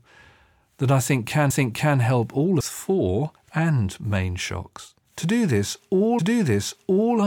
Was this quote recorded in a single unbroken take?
no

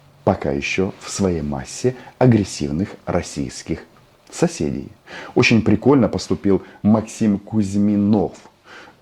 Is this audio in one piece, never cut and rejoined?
yes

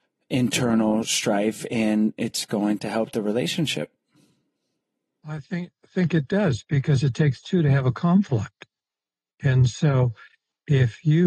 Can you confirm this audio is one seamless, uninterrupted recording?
yes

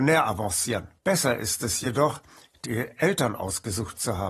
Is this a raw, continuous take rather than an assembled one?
no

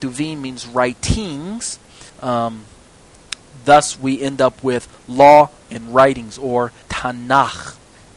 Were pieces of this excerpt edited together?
yes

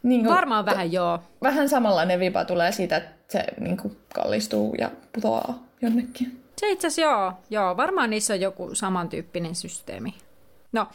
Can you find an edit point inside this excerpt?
yes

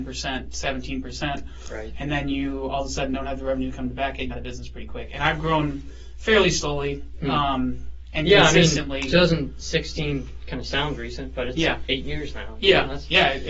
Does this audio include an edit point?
yes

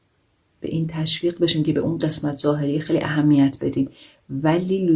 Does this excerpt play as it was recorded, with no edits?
yes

